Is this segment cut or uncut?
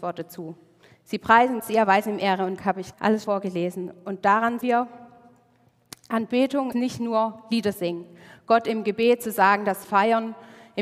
cut